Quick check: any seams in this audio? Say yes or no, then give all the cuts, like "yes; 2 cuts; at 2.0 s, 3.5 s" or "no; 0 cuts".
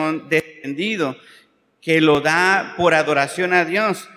no; 0 cuts